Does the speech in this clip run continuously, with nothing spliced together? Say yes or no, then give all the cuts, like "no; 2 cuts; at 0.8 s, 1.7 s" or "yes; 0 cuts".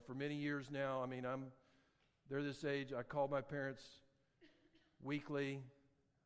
yes; 0 cuts